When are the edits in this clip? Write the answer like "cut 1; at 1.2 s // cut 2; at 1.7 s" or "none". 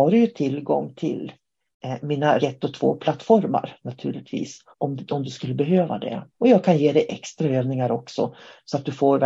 cut 1; at 2.4 s // cut 2; at 4.7 s // cut 3; at 6.3 s